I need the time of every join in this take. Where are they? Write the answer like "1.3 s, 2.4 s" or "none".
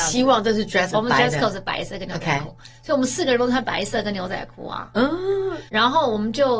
0.9 s, 5.7 s